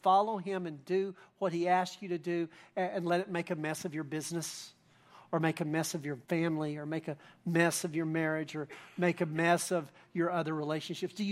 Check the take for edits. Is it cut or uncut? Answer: cut